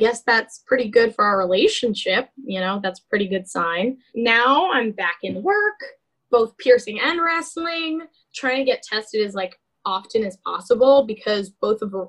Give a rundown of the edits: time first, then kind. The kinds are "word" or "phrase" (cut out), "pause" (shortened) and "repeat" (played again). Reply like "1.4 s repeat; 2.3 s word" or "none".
none